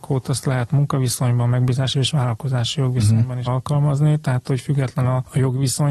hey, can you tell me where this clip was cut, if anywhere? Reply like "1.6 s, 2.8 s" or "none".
1.9 s, 3.5 s